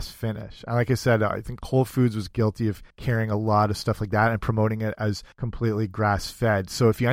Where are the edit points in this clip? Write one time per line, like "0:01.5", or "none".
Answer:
0:02.9
0:05.3